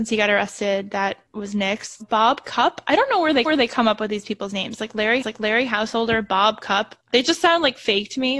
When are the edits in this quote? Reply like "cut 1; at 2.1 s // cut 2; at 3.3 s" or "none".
cut 1; at 2.0 s // cut 2; at 3.4 s // cut 3; at 5.2 s // cut 4; at 7.1 s